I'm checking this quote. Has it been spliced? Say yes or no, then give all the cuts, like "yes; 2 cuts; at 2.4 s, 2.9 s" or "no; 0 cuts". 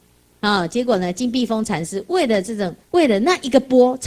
yes; 1 cut; at 2.8 s